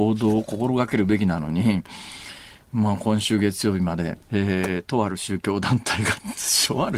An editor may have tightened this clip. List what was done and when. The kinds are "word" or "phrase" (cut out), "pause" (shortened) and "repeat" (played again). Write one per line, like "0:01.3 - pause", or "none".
0:04.2 - pause